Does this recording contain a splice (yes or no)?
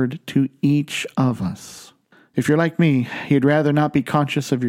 yes